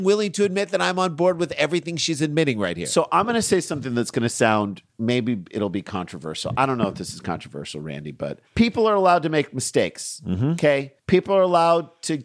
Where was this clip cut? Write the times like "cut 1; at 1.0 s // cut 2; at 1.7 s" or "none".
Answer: cut 1; at 4.9 s // cut 2; at 8.5 s // cut 3; at 11.0 s